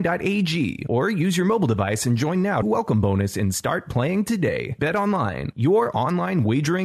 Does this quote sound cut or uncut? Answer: cut